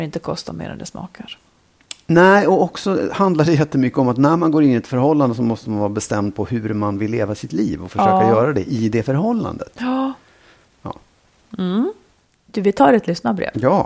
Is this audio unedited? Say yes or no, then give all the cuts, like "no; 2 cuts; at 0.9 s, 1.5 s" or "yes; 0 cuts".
yes; 0 cuts